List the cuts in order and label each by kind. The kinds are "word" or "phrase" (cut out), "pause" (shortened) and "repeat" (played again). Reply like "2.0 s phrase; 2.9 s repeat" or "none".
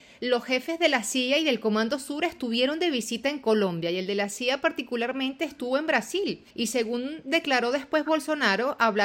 6.5 s pause

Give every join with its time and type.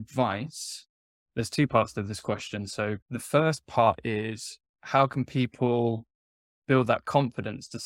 3.0 s pause; 4.7 s pause

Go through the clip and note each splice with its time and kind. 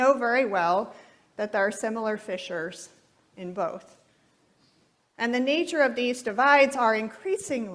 none

